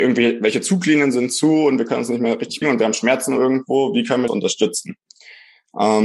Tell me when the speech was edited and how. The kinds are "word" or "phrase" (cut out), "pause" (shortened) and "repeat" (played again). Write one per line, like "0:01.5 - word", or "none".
0:02.6 - word
0:04.3 - phrase